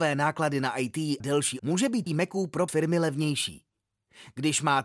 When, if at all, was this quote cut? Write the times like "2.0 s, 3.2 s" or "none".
1.2 s, 1.6 s, 2.1 s, 2.7 s